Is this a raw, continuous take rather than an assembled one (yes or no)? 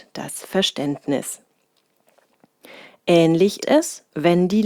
no